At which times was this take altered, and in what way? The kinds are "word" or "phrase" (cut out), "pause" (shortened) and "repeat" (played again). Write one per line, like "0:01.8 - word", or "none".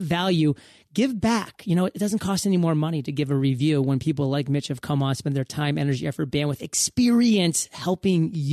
none